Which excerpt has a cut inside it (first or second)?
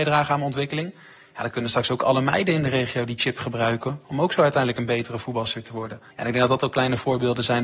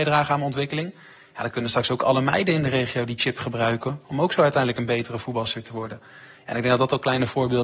first